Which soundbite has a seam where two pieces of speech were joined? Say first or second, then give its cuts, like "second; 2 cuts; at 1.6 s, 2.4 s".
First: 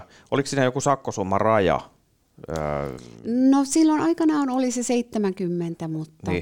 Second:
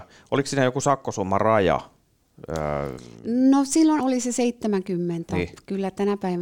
second; 2 cuts; at 4.0 s, 5.3 s